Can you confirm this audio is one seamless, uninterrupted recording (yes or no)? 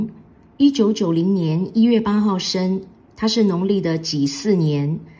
yes